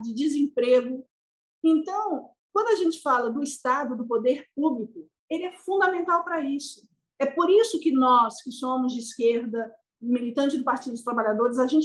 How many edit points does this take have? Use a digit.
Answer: 0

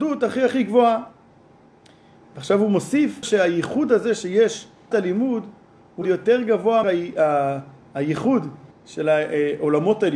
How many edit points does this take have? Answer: 5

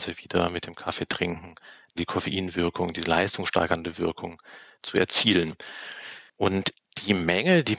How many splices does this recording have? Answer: 1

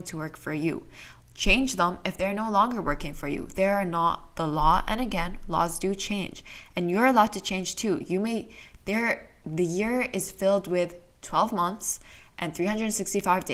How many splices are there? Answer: 1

